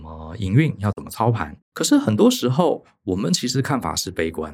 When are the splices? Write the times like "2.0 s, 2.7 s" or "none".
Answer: 1.6 s